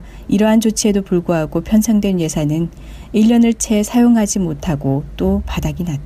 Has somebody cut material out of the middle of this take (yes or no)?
no